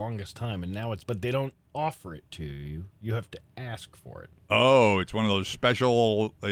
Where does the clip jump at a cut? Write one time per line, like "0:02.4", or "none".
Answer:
0:01.0